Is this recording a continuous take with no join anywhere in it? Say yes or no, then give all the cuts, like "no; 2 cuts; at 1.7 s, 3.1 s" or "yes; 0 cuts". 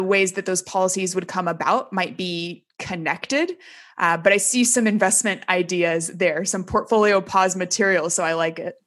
yes; 0 cuts